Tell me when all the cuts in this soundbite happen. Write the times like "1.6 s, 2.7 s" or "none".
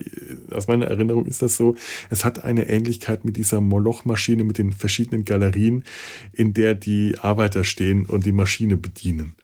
none